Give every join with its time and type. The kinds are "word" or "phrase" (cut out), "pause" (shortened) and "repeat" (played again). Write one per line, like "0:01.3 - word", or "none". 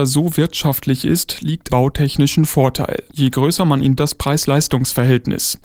0:01.7 - phrase
0:03.1 - pause
0:04.0 - phrase